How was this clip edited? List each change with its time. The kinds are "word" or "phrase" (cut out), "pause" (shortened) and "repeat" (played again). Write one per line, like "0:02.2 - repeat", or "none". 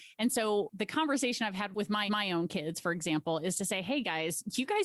0:02.1 - repeat

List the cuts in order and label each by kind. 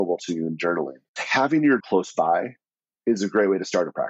0:01.2 - word
0:01.8 - word

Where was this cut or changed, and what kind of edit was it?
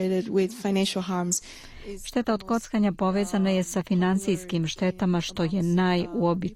none

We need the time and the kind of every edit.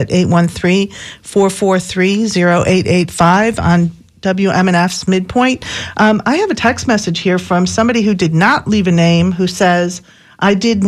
none

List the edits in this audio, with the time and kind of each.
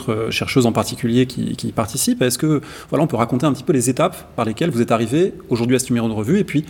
none

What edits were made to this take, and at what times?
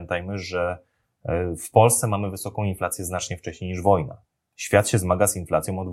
none

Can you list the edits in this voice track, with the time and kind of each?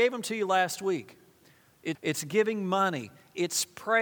0:01.9 - word

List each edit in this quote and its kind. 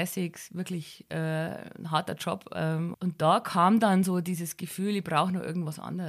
0:02.9 - word

